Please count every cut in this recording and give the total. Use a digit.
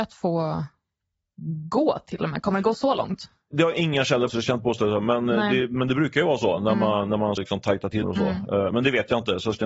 3